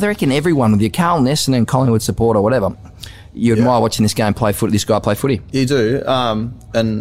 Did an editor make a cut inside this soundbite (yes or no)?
no